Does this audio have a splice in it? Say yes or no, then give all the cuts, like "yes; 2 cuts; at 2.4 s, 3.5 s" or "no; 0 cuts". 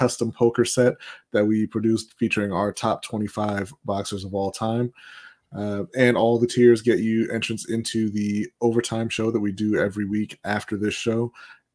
no; 0 cuts